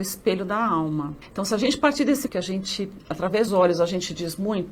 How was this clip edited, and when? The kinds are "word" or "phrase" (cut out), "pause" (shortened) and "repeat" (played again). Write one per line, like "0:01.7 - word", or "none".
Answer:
0:01.2 - pause
0:02.3 - word
0:03.5 - word